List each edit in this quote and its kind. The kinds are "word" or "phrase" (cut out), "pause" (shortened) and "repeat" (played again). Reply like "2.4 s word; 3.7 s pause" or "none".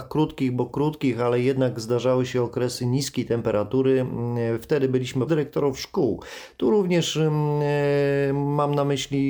5.3 s phrase